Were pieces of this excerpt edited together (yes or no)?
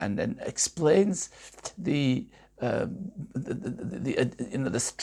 no